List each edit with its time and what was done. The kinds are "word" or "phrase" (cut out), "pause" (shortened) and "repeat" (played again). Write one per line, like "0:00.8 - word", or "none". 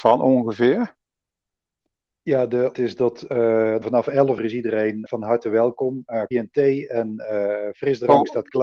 0:02.7 - word
0:03.8 - word
0:04.4 - word
0:05.1 - word
0:06.3 - word